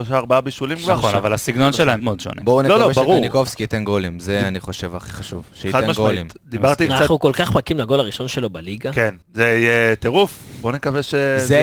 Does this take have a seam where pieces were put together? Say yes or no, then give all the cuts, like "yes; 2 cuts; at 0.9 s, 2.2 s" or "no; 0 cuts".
yes; 2 cuts; at 2.0 s, 9.2 s